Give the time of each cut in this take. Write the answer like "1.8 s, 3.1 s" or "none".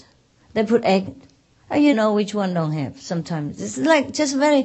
1.1 s, 1.9 s